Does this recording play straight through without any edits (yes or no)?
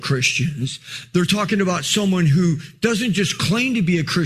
yes